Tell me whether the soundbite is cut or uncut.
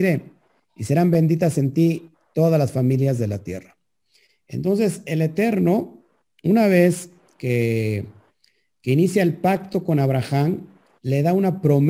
uncut